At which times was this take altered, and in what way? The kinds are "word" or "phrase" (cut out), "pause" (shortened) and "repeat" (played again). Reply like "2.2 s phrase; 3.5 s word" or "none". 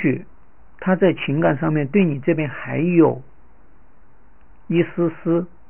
none